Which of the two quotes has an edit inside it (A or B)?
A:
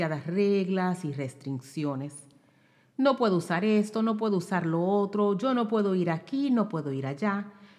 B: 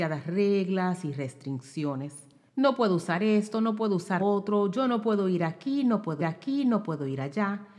B